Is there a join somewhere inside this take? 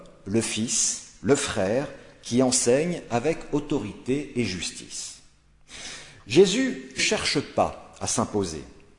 yes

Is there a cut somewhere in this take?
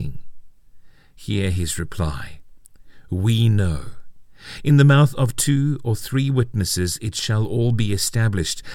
no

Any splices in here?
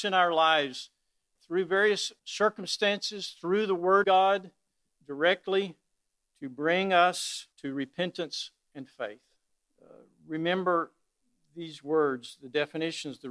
yes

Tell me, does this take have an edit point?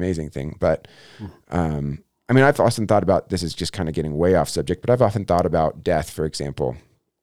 no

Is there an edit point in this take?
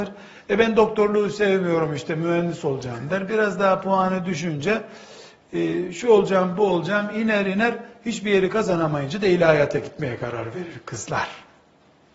no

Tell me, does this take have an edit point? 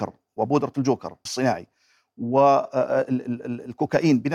yes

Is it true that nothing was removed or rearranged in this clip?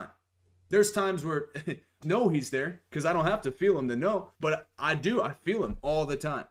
no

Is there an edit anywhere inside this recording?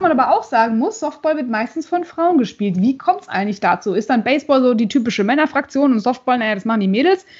no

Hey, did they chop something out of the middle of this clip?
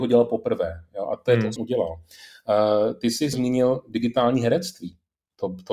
yes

